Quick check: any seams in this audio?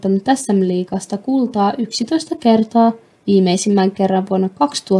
no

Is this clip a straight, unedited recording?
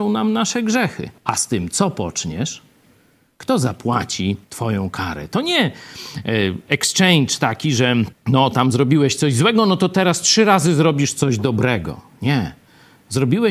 no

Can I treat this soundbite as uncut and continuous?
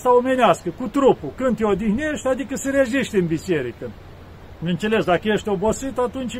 yes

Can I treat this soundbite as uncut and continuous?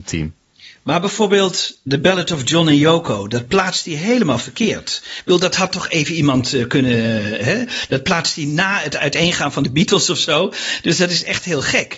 yes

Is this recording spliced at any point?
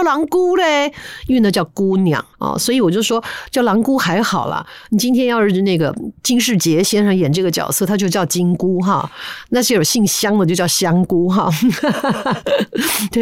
yes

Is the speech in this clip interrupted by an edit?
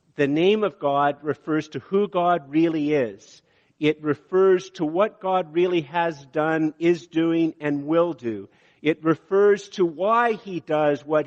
no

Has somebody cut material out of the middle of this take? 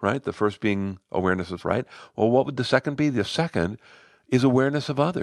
yes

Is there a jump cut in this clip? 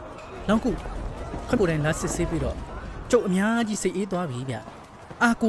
yes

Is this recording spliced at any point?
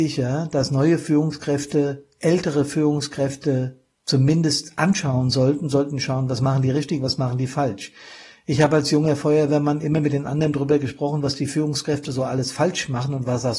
no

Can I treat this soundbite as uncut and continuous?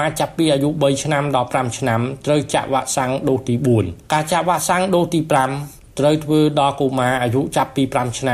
no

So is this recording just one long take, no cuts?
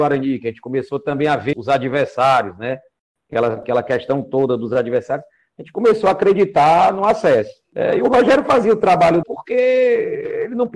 no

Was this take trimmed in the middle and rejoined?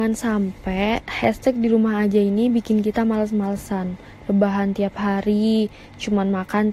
no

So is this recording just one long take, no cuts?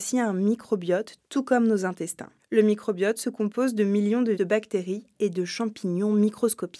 no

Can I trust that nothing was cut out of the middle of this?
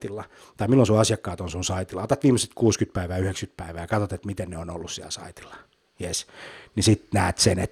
yes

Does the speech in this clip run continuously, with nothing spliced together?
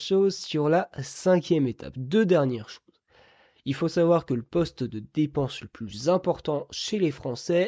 yes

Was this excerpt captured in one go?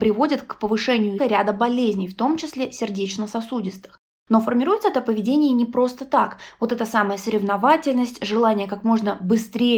no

